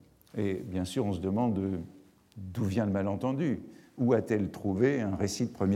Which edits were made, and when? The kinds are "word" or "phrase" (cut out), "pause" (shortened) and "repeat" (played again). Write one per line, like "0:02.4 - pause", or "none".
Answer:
none